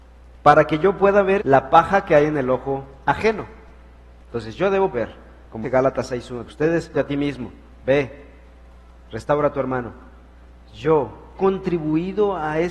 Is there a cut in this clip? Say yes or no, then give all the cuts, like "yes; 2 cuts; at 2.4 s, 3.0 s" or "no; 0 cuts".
yes; 6 cuts; at 1.4 s, 4.9 s, 5.6 s, 6.5 s, 6.9 s, 11.4 s